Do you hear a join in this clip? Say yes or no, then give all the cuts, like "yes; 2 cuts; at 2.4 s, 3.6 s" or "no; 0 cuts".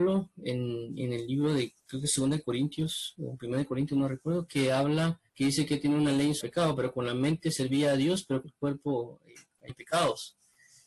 yes; 5 cuts; at 1.8 s, 5.3 s, 6.4 s, 8.4 s, 9.7 s